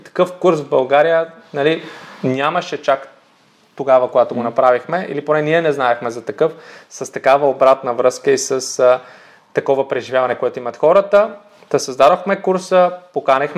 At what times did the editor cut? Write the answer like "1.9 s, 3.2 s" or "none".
none